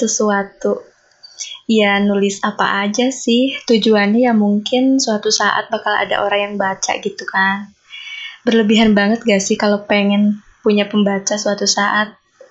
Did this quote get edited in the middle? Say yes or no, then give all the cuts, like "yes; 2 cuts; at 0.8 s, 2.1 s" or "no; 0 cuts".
no; 0 cuts